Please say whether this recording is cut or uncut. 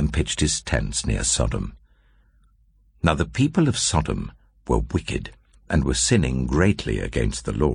uncut